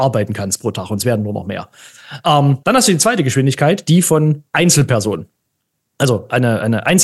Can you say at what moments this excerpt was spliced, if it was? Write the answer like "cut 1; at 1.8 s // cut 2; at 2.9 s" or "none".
cut 1; at 2.6 s // cut 2; at 4.5 s